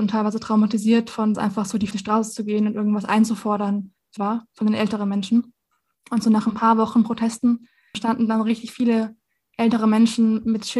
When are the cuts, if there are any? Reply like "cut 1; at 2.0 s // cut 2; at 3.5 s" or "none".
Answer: cut 1; at 1.3 s // cut 2; at 1.9 s // cut 3; at 4.2 s